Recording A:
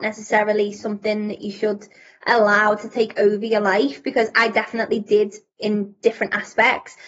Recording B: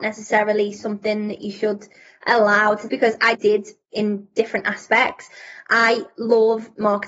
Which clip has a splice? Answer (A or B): B